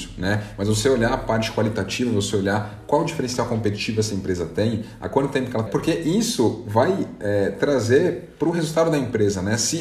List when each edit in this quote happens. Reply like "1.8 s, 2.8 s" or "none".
5.7 s